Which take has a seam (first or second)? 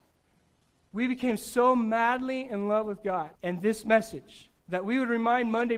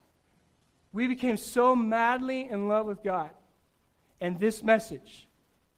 first